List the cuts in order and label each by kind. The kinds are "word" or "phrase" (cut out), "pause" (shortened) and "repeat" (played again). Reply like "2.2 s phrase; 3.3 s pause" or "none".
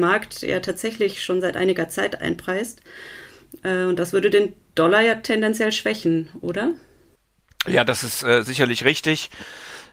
none